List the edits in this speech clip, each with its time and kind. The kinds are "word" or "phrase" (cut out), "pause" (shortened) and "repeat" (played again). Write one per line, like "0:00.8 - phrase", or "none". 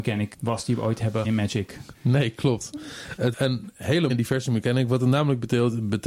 0:01.2 - word
0:03.3 - word
0:04.1 - word